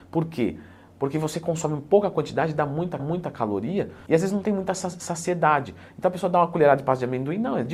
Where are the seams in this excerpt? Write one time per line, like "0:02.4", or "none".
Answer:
0:03.0